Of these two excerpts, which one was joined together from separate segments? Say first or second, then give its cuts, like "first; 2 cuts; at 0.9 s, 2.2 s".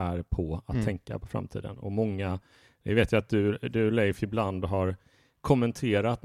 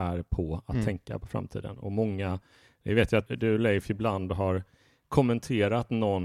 second; 1 cut; at 3.3 s